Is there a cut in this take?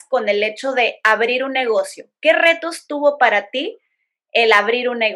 no; 0 cuts

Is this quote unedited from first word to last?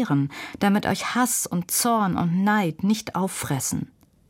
yes; 0 cuts

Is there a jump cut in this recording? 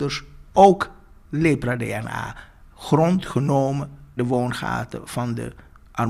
yes; 1 cut; at 4.2 s

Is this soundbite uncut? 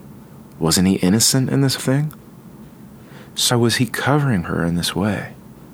no; 3 cuts; at 1.8 s, 3.5 s, 4.4 s

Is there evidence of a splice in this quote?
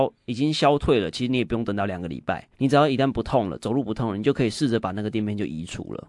yes; 1 cut; at 2.5 s

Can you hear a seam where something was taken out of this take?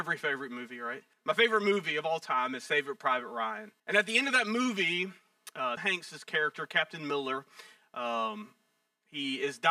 yes; 3 cuts; at 1.1 s, 3.8 s, 5.8 s

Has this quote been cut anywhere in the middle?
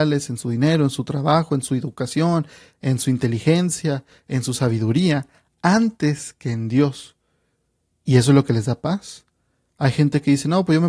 no; 0 cuts

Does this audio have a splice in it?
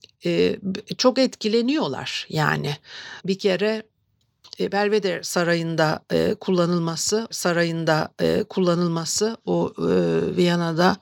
yes; 3 cuts; at 3.2 s, 4.2 s, 7.3 s

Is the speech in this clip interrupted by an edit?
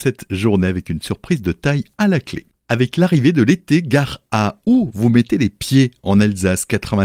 no; 0 cuts

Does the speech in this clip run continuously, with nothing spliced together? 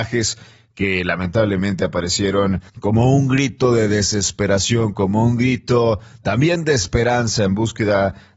no; 1 cut; at 2.7 s

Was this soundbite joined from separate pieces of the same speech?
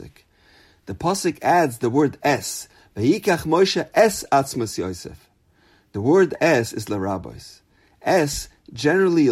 no; 0 cuts

